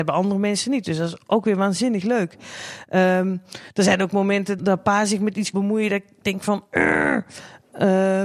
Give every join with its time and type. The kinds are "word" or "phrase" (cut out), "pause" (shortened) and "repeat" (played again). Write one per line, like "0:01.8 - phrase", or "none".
0:04.6 - word
0:05.5 - word